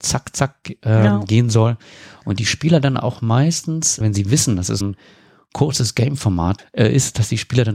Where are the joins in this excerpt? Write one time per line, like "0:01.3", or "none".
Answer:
0:04.0
0:04.8
0:06.6